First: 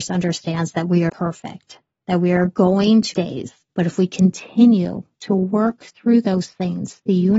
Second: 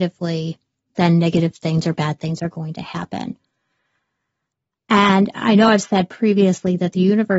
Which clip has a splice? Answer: first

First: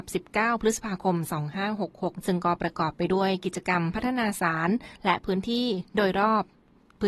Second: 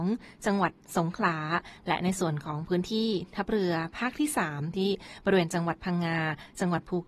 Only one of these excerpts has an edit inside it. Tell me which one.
first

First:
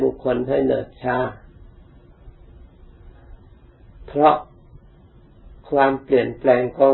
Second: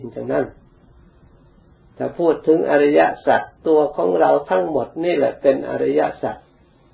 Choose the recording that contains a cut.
second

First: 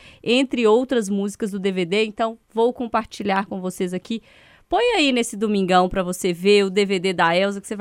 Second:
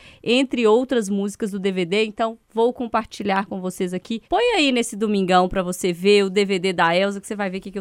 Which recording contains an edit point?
second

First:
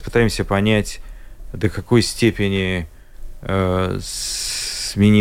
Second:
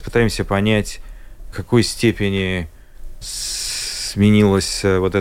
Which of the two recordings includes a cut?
second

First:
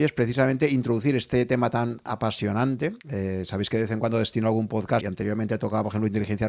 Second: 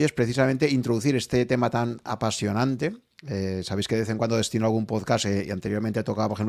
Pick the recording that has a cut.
first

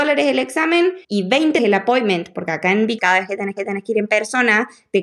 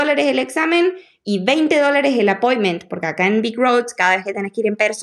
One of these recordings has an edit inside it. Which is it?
first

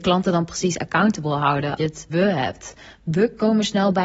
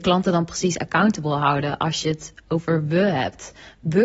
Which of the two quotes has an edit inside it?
first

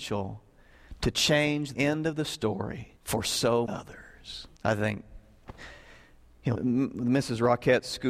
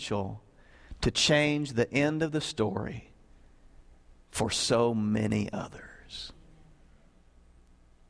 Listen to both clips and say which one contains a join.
first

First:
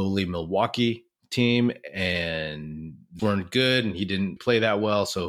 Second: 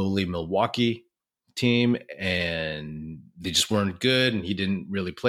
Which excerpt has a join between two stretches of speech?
first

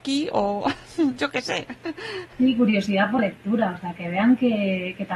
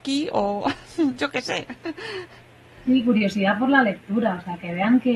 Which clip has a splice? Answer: first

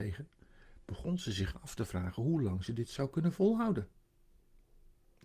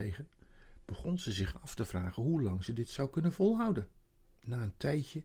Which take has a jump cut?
second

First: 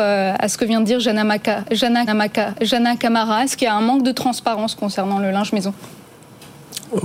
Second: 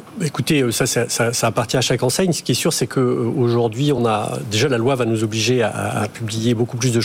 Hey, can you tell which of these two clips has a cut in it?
first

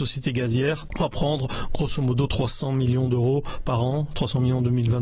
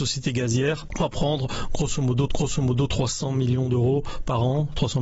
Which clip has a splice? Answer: second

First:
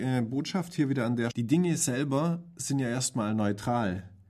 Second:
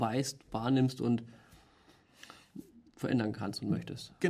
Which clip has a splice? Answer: first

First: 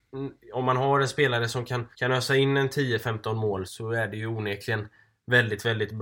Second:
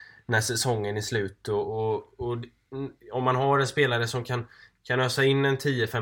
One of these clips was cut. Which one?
first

